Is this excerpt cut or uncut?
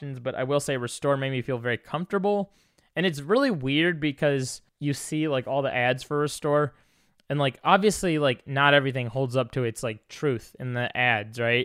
cut